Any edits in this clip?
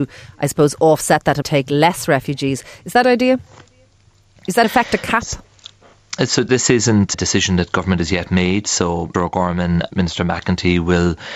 yes; 7 cuts; at 1.4 s, 3.0 s, 4.6 s, 6.5 s, 7.1 s, 9.1 s, 9.9 s

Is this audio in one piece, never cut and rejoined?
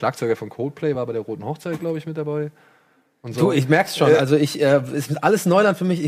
yes; 0 cuts

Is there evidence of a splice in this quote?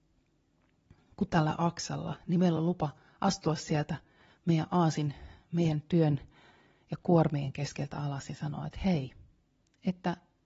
no; 0 cuts

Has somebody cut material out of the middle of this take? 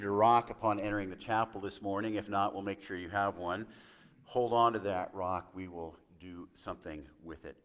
no; 0 cuts

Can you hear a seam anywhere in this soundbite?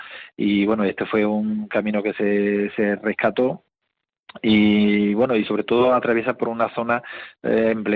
no; 0 cuts

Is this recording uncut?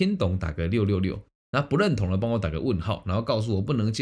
yes; 0 cuts

